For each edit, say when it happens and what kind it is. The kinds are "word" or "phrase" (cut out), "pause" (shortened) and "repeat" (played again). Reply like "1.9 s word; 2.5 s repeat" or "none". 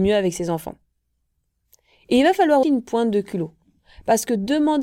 2.6 s word